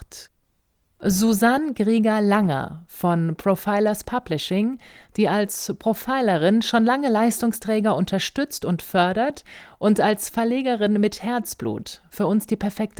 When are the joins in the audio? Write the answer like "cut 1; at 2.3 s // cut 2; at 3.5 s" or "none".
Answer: none